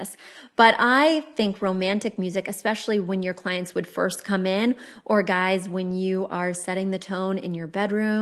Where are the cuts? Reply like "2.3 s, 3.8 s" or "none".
none